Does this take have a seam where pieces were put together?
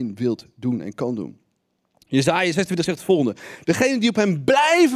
no; 0 cuts

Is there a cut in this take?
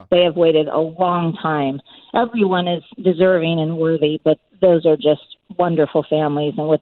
no; 0 cuts

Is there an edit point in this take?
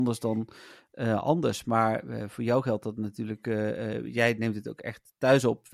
no; 0 cuts

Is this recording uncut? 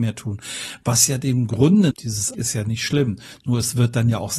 no; 2 cuts; at 1.9 s, 2.3 s

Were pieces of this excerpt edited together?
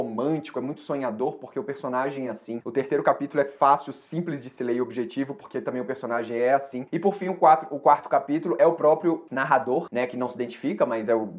no; 0 cuts

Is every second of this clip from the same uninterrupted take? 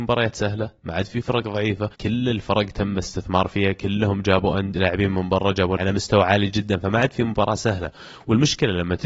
no; 2 cuts; at 1.9 s, 5.8 s

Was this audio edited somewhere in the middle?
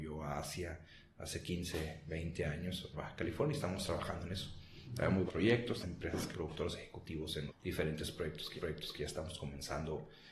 yes; 6 cuts; at 2.9 s, 5.3 s, 5.8 s, 6.3 s, 7.5 s, 8.6 s

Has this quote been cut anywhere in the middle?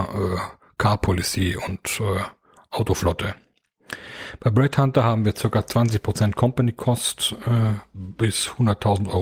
no; 0 cuts

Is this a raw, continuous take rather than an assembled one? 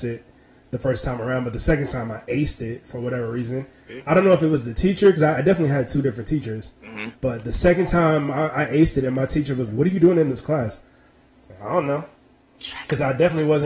no; 2 cuts; at 7.1 s, 9.7 s

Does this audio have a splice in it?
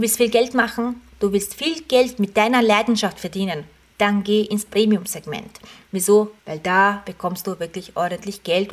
yes; 1 cut; at 6.4 s

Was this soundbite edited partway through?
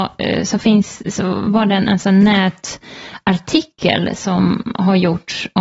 no; 0 cuts

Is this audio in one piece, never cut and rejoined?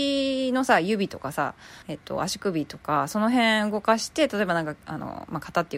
no; 1 cut; at 1.8 s

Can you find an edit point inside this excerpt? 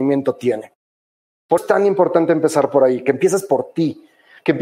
yes; 1 cut; at 1.6 s

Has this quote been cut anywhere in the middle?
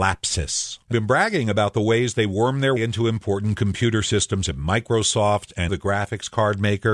yes; 3 cuts; at 0.9 s, 2.8 s, 5.7 s

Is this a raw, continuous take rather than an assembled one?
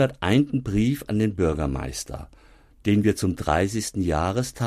yes; 0 cuts

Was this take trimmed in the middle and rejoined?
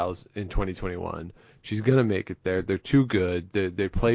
no; 0 cuts

